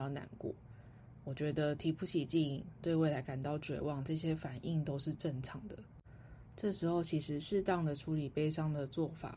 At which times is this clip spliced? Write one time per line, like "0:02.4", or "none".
0:02.8